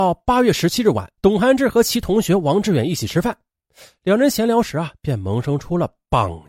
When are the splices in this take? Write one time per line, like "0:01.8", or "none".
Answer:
0:01.2

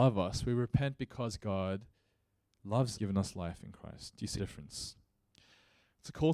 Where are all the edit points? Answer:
0:02.9
0:04.4

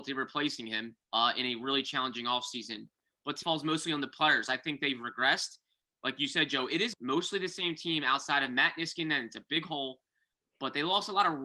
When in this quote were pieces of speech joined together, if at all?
0:01.0
0:03.4
0:06.9

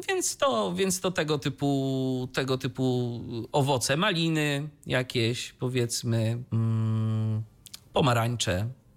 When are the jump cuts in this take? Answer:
0:06.5

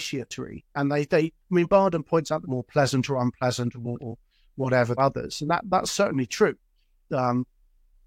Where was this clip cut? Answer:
0:01.4
0:02.4
0:04.0
0:05.0

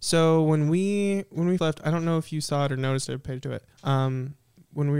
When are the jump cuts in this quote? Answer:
0:01.6
0:03.4
0:03.7

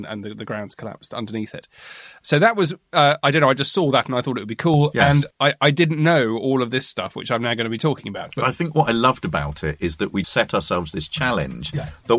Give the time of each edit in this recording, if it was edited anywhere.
0:10.2

